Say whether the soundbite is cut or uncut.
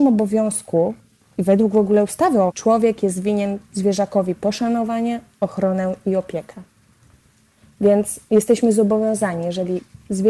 cut